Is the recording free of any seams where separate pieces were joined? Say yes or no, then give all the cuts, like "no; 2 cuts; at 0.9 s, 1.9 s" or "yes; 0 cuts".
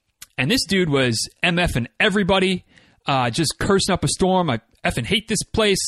yes; 0 cuts